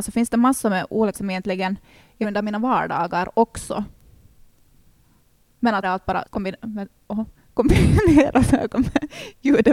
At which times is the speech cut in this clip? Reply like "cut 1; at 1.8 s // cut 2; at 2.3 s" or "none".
cut 1; at 1.1 s // cut 2; at 2.2 s // cut 3; at 5.8 s // cut 4; at 6.2 s

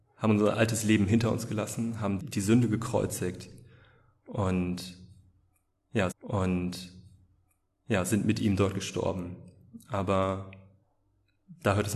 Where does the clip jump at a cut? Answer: cut 1; at 2.2 s // cut 2; at 6.1 s

